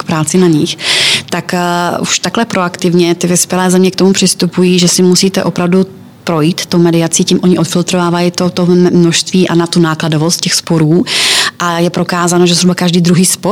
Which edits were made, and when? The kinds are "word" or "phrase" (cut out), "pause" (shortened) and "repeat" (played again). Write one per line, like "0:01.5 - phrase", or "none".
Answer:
none